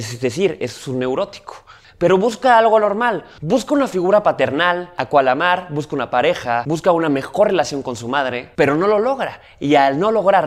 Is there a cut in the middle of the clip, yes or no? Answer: no